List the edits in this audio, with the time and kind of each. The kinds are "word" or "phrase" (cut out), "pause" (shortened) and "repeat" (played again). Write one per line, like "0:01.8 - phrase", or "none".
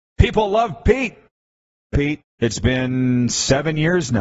0:01.9 - phrase
0:02.3 - pause